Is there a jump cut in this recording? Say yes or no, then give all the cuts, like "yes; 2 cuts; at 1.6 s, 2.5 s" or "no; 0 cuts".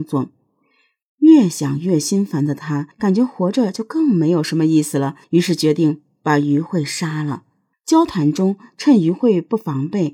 yes; 3 cuts; at 2.9 s, 5.2 s, 7.7 s